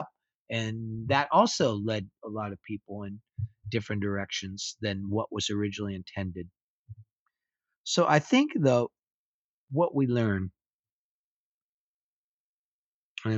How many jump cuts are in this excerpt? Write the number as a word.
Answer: zero